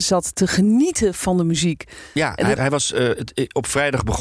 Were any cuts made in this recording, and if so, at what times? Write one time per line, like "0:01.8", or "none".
0:02.6